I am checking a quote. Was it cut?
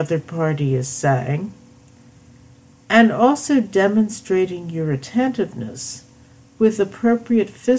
no; 0 cuts

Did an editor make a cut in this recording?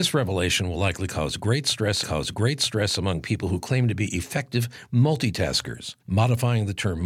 yes; 2 cuts; at 2.0 s, 6.0 s

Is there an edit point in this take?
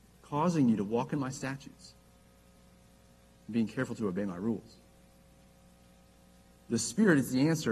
no; 0 cuts

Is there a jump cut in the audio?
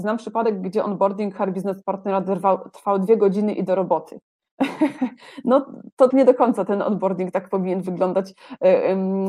yes; 1 cut; at 6.1 s

